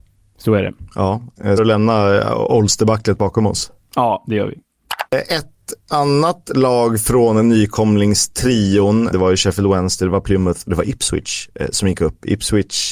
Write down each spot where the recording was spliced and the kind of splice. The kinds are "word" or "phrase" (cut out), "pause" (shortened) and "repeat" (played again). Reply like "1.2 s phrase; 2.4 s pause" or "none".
1.6 s phrase; 5.1 s pause; 9.1 s word